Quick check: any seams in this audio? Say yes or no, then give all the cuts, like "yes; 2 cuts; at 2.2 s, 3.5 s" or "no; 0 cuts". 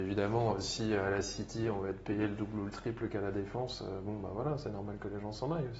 no; 0 cuts